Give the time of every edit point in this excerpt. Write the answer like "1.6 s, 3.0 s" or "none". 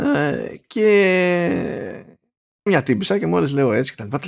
2.7 s